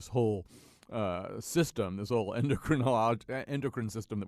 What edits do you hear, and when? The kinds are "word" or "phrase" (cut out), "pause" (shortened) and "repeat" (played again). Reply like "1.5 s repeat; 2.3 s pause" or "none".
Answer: none